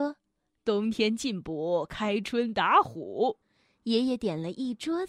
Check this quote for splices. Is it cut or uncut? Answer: cut